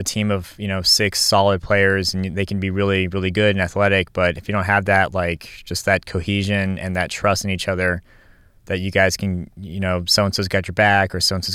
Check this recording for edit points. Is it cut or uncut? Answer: uncut